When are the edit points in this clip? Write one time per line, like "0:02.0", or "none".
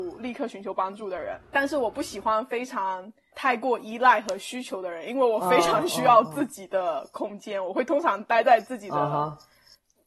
0:01.4